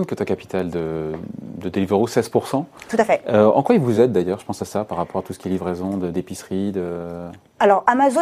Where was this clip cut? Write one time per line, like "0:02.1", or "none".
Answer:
none

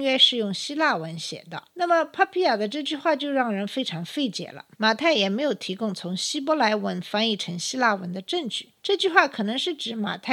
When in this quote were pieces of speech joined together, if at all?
0:01.7
0:04.7
0:08.8

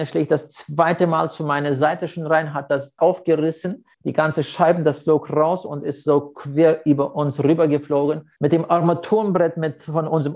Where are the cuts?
0:03.0
0:03.9
0:08.4

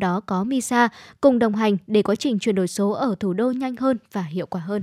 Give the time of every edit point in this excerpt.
none

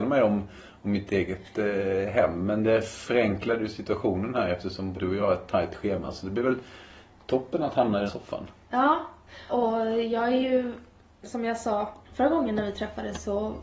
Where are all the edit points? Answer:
0:04.9
0:08.1
0:09.5
0:12.0

